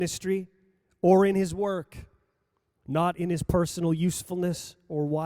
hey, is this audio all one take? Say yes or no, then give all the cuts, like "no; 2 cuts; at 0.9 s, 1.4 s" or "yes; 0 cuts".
yes; 0 cuts